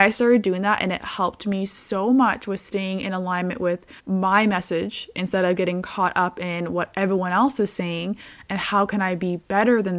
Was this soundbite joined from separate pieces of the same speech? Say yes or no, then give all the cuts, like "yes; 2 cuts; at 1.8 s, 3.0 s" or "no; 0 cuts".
yes; 1 cut; at 4.0 s